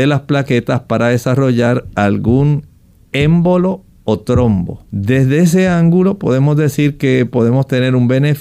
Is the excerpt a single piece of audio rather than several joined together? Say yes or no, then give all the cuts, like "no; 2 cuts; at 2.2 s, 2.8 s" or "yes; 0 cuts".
no; 1 cut; at 4.9 s